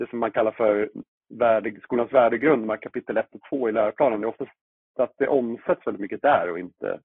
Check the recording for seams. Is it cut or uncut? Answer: uncut